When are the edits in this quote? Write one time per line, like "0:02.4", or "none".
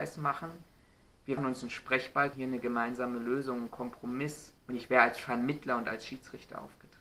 0:01.4
0:02.3
0:04.6

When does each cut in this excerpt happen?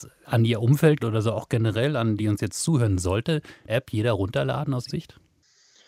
0:01.0
0:02.2
0:03.7
0:04.9

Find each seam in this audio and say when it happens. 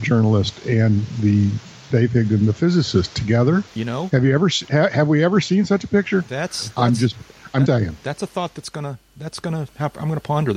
0:01.9
0:03.7
0:07.7

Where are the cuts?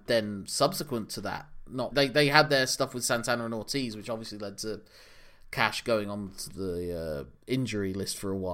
0:01.9
0:06.5

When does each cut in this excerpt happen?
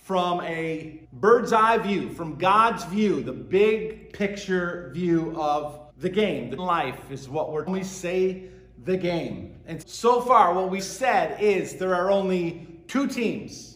0:01.0
0:05.9
0:06.6
0:07.7
0:09.8
0:10.8

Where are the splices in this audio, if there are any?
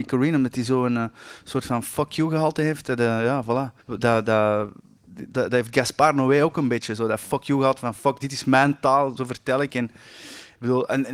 0:03.8
0:05.3
0:08.2
0:09.2

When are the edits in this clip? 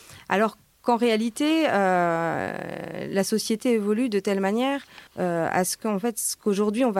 0:05.1

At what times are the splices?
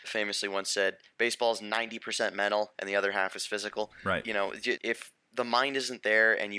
0:04.8

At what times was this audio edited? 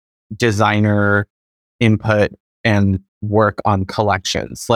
none

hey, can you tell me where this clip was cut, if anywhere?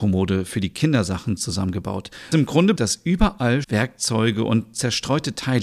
0:02.3
0:02.8
0:03.6

